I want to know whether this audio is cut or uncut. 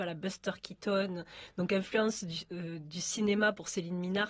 uncut